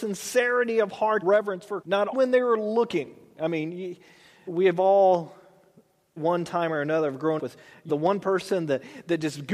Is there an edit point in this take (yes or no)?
yes